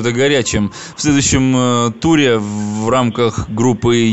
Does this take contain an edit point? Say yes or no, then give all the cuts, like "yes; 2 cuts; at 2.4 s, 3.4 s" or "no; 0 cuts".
no; 0 cuts